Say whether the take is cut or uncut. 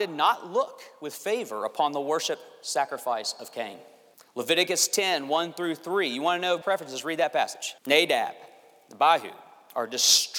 cut